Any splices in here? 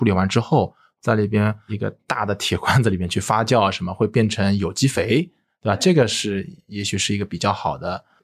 no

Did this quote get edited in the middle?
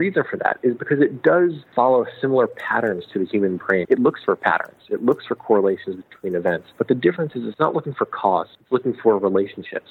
yes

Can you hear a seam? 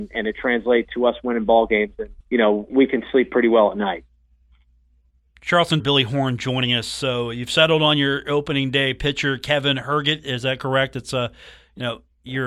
yes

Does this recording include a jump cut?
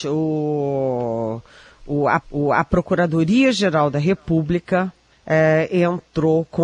yes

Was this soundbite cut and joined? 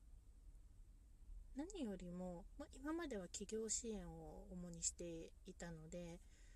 no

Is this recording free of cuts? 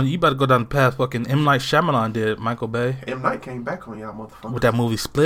yes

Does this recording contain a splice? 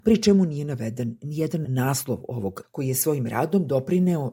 yes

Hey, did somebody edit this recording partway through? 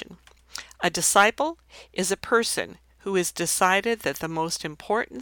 no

